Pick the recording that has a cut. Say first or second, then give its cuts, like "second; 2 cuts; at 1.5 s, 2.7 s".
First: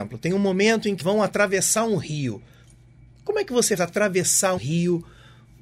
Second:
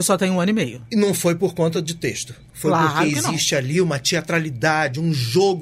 first; 3 cuts; at 1.0 s, 3.8 s, 4.6 s